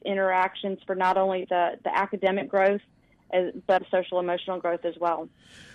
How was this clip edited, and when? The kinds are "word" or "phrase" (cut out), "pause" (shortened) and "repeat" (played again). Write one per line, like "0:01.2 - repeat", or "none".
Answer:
0:03.8 - word